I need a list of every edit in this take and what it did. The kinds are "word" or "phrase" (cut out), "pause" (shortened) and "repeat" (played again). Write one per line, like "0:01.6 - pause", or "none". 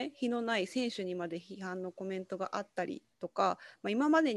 0:03.1 - pause